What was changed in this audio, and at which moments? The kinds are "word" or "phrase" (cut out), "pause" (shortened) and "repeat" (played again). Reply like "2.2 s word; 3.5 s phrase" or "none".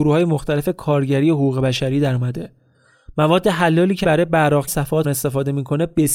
4.0 s word; 4.7 s word; 5.0 s word